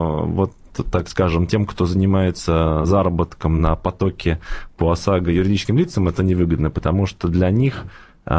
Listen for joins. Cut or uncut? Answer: uncut